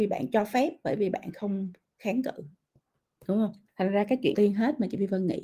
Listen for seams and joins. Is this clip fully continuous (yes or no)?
no